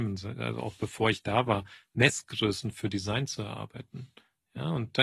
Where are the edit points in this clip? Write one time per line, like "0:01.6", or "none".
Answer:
none